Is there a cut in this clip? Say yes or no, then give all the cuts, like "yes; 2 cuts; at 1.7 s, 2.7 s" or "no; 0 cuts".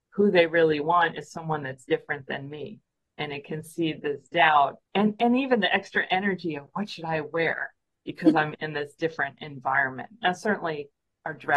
yes; 1 cut; at 4.8 s